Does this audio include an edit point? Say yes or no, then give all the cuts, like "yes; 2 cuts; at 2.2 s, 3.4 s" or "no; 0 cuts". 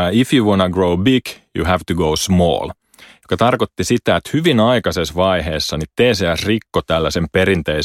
no; 0 cuts